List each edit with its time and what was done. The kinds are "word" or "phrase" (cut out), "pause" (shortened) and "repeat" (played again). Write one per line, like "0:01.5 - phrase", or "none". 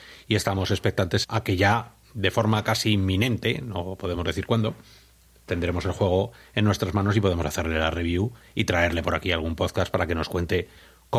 0:01.2 - word

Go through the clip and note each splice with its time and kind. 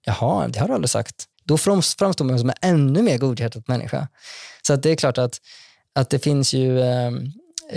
0:01.3 - pause

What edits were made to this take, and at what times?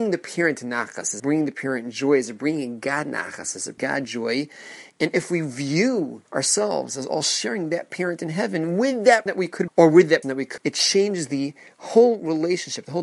0:01.2 - word
0:03.8 - word
0:06.3 - pause
0:09.3 - word
0:09.7 - phrase
0:10.2 - word
0:10.6 - phrase

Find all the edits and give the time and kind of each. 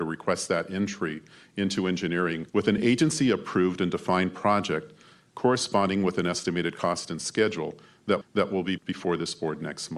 0:02.5 - pause
0:08.2 - repeat
0:08.8 - word

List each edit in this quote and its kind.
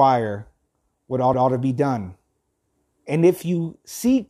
0:01.3 - repeat
0:02.7 - pause

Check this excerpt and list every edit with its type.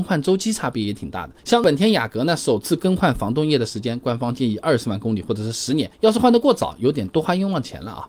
0:01.4 - pause
0:05.9 - pause

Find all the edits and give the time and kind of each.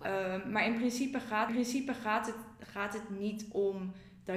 0:01.5 - repeat

